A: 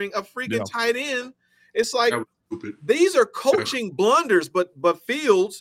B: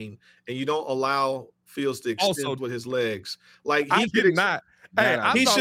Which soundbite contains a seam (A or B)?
B